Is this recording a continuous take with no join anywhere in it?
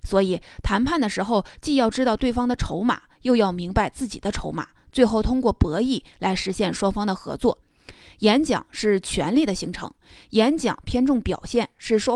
yes; 0 cuts

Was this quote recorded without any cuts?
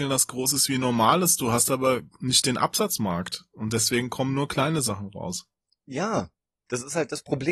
yes; 0 cuts

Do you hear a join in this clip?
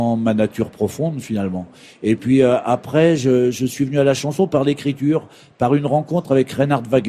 no; 0 cuts

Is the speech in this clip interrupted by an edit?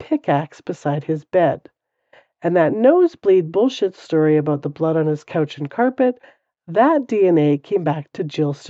no; 0 cuts

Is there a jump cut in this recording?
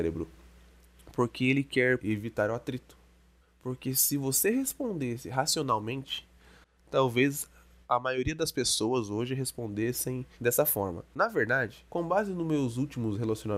yes; 4 cuts; at 2.0 s, 3.4 s, 10.3 s, 11.9 s

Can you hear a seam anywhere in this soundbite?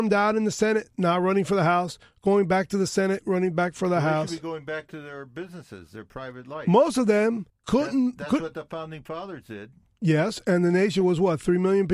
yes; 1 cut; at 7.5 s

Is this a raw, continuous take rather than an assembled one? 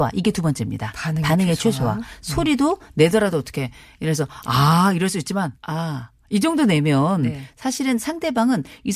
no; 1 cut; at 5.6 s

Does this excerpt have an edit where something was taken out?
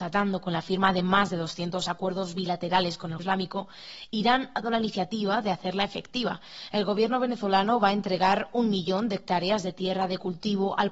yes; 2 cuts; at 3.2 s, 4.6 s

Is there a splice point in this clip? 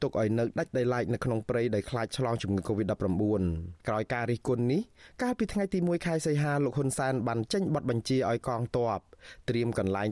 yes; 1 cut; at 3.8 s

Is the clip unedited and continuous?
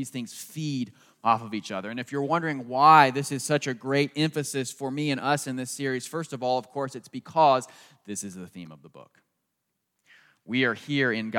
yes; 0 cuts

